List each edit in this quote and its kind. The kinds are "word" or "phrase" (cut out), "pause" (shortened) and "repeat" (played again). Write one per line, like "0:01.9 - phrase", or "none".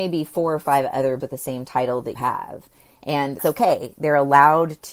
0:01.2 - word
0:02.2 - word
0:03.4 - word